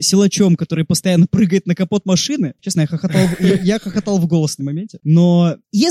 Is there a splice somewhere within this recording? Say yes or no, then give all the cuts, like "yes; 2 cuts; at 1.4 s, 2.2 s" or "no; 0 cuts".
yes; 1 cut; at 4.6 s